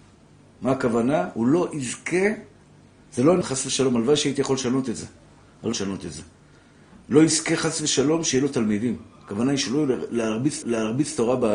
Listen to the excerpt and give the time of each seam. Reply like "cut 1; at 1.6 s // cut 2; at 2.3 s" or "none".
cut 1; at 3.4 s // cut 2; at 5.7 s // cut 3; at 10.6 s